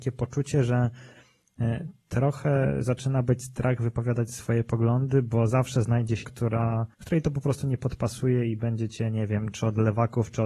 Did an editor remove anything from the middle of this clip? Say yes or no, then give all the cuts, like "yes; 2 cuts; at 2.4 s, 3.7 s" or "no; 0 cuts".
yes; 2 cuts; at 6.2 s, 6.9 s